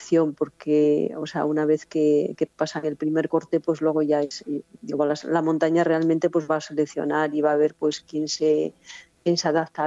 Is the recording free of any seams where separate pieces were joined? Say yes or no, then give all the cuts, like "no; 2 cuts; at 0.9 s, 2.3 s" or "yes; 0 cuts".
yes; 0 cuts